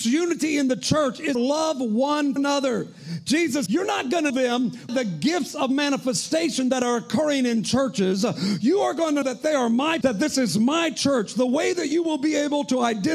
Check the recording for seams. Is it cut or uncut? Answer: cut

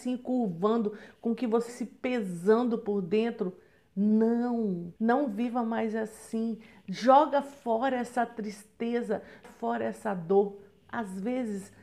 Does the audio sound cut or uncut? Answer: cut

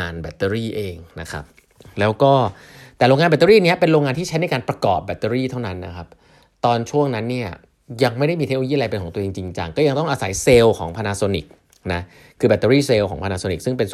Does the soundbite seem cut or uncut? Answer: uncut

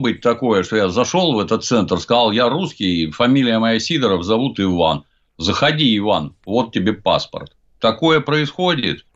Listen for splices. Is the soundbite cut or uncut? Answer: uncut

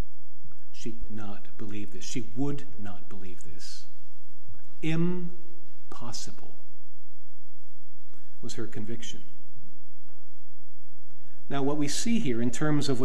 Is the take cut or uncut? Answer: cut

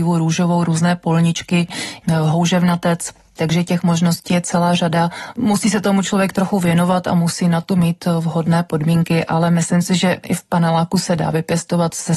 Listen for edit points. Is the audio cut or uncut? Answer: uncut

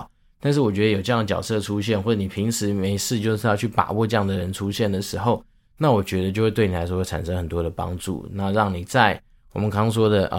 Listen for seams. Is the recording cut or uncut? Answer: uncut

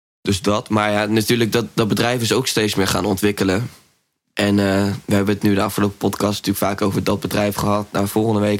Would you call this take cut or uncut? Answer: uncut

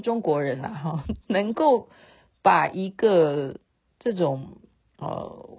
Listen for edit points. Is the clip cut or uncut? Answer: uncut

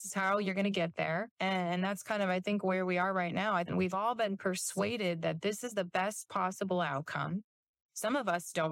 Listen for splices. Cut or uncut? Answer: uncut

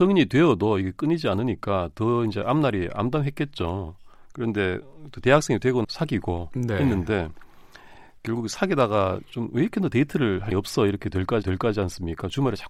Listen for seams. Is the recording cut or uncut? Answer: cut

